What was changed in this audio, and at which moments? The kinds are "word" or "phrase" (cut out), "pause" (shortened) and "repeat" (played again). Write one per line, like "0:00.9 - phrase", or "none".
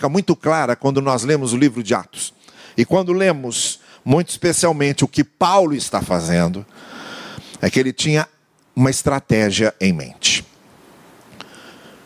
none